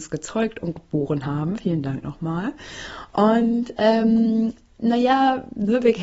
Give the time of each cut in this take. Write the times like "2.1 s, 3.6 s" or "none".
none